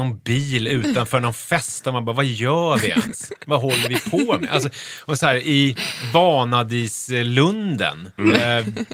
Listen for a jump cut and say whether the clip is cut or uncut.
uncut